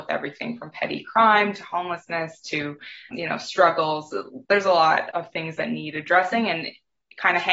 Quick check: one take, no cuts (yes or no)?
no